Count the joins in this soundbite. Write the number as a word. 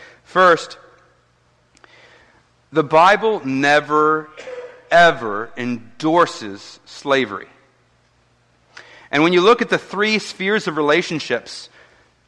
zero